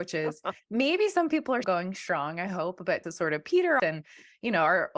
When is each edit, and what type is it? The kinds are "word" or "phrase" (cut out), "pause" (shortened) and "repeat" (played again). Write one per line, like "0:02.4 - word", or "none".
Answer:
0:01.6 - word
0:03.0 - phrase
0:03.8 - word